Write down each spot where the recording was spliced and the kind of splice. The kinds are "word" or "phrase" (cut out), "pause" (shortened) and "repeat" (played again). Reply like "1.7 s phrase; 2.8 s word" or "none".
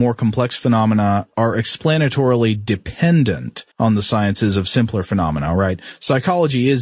3.7 s pause

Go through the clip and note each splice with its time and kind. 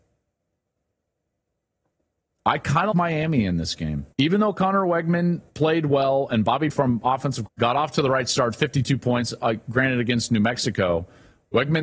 2.9 s word; 4.1 s pause; 5.5 s pause; 6.7 s phrase; 7.5 s phrase

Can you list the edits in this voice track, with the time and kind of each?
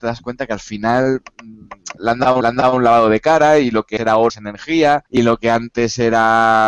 2.0 s word; 2.4 s repeat; 4.0 s word; 4.3 s word; 5.1 s pause

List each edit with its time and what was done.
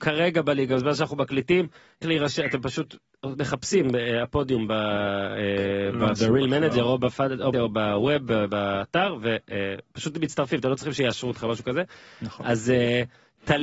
2.0 s phrase; 7.5 s word

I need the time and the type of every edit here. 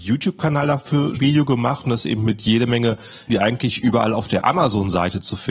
1.2 s word; 3.3 s word

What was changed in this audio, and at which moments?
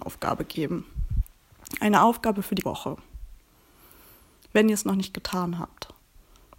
2.6 s word

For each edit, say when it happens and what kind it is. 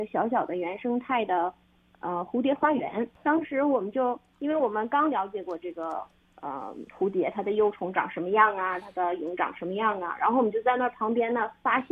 6.9 s pause

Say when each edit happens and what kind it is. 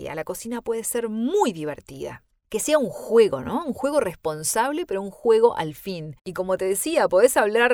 6.2 s pause

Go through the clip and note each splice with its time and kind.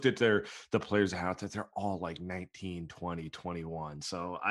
none

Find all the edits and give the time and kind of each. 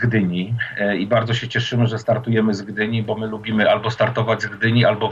none

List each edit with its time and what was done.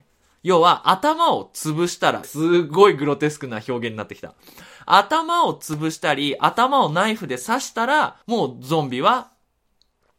2.2 s phrase; 8.2 s pause

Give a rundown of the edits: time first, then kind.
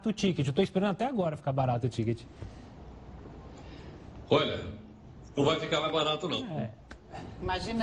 none

